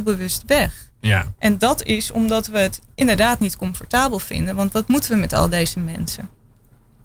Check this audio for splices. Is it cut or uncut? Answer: uncut